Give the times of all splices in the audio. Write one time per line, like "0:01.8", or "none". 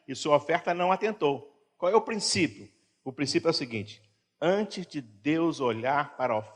none